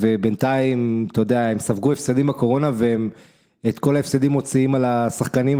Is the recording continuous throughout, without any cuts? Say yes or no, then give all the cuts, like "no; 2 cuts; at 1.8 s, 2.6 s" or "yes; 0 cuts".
yes; 0 cuts